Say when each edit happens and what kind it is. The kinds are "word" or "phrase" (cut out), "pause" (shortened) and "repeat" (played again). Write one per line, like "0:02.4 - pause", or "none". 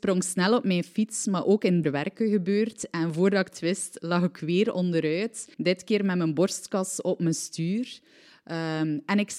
0:01.8 - phrase
0:05.5 - pause